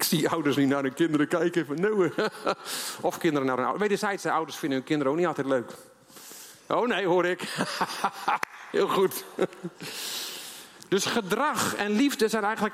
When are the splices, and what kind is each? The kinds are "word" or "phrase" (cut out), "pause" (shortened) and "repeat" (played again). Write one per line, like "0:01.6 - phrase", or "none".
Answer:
none